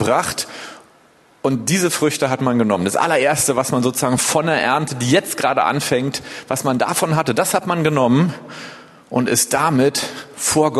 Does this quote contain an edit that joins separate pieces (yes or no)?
no